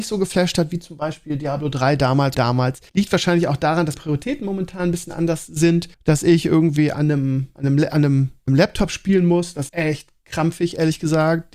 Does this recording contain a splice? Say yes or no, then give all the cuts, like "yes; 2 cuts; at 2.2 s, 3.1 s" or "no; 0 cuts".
yes; 7 cuts; at 2.3 s, 2.9 s, 4.0 s, 5.9 s, 7.6 s, 8.5 s, 9.7 s